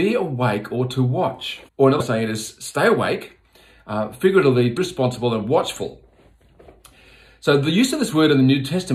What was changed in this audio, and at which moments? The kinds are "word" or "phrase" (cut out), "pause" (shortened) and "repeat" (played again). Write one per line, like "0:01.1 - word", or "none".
0:01.7 - pause
0:02.0 - word
0:04.8 - phrase